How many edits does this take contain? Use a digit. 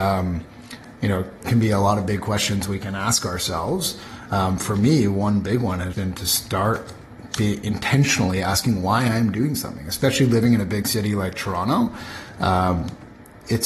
2